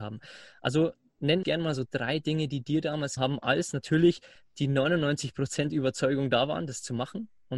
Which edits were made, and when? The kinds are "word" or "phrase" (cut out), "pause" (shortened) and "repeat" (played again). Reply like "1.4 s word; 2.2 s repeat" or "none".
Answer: 1.4 s word; 1.9 s word; 3.2 s word

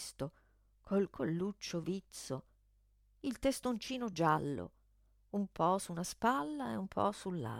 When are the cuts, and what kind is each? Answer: none

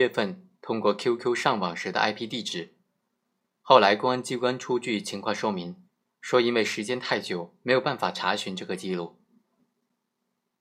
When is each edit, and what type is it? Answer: none

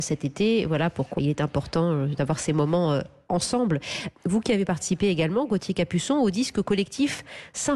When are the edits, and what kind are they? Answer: 1.2 s word

